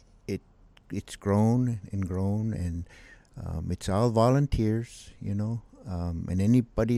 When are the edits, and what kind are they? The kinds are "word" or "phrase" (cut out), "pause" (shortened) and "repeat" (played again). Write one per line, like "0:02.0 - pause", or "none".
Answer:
none